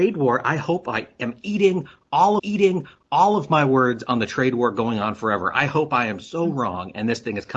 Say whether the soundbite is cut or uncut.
cut